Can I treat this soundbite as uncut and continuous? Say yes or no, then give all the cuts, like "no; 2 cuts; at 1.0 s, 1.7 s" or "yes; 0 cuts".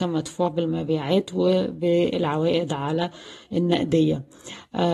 yes; 0 cuts